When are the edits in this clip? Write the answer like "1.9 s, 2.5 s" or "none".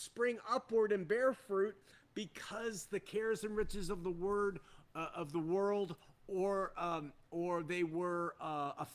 none